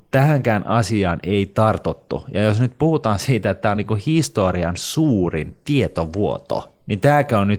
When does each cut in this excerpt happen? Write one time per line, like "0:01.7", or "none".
none